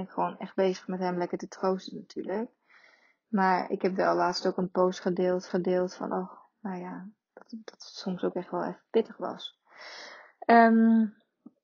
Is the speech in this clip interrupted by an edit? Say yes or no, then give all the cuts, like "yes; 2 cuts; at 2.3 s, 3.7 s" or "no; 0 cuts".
yes; 1 cut; at 5.5 s